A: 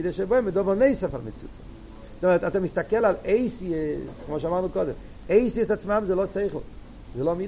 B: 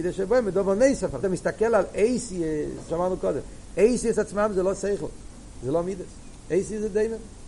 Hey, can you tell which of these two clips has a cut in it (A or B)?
B